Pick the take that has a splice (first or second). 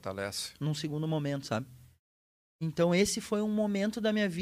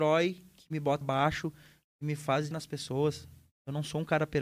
second